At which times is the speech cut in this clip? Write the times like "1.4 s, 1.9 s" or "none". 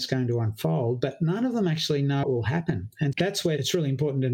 2.2 s, 3.1 s